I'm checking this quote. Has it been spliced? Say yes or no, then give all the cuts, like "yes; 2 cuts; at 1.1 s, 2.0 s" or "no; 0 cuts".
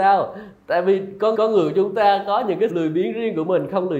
yes; 2 cuts; at 1.3 s, 2.7 s